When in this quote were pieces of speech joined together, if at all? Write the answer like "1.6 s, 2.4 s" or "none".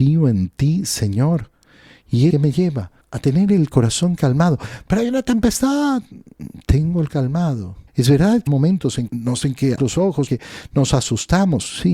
2.3 s, 3.0 s, 7.1 s, 7.9 s, 8.5 s, 9.1 s, 9.4 s, 9.8 s, 10.3 s